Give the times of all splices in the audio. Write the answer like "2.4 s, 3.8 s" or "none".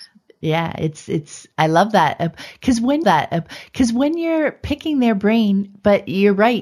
3.0 s